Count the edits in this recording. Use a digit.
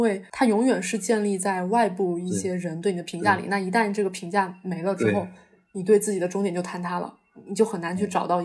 0